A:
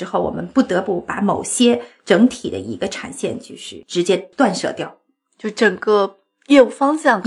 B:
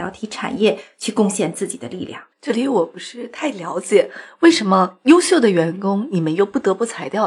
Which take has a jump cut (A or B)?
B